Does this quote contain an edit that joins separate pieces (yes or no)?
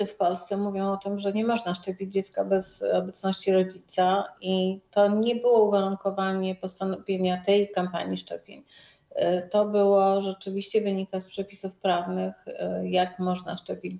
no